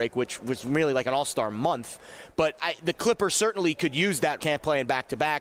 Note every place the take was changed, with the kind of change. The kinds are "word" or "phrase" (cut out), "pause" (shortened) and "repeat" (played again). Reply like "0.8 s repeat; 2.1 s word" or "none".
2.6 s word; 4.4 s phrase